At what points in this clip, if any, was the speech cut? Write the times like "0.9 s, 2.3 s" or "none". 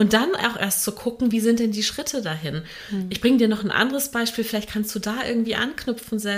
none